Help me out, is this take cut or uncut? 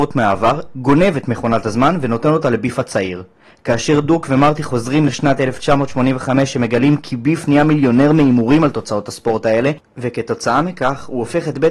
uncut